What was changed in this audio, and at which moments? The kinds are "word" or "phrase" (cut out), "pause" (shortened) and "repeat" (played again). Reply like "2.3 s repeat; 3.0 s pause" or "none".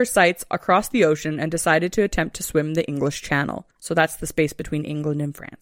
3.7 s pause